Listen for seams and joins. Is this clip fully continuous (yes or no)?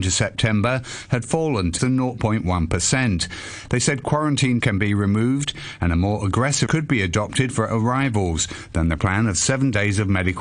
no